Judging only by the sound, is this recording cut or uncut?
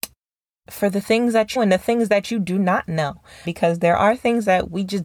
cut